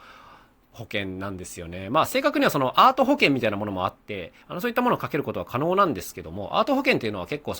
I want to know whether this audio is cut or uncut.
cut